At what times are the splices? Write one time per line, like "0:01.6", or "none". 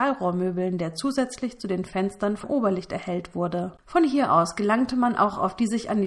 0:02.4
0:03.8